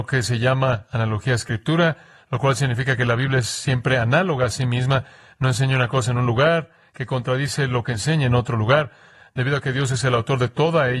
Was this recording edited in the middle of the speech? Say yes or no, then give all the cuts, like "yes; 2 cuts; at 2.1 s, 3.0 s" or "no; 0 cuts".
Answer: no; 0 cuts